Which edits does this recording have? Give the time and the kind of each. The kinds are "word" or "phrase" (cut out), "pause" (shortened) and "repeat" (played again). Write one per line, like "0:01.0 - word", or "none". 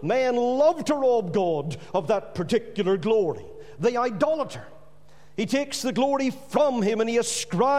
none